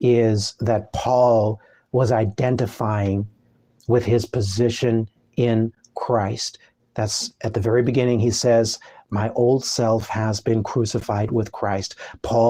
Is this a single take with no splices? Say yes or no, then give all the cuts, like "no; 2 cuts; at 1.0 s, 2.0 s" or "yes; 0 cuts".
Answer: yes; 0 cuts